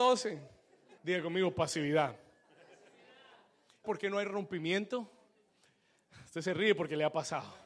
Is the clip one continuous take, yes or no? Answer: no